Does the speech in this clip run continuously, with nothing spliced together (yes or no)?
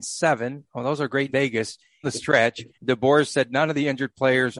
no